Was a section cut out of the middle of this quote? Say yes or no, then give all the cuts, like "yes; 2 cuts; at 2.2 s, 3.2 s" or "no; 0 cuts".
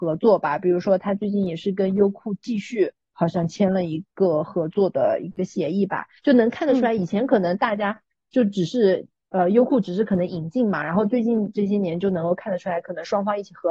no; 0 cuts